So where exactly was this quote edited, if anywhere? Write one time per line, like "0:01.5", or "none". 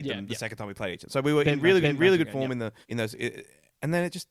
0:01.8
0:02.8